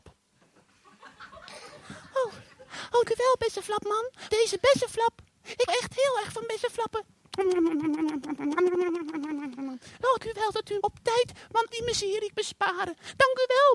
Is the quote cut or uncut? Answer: cut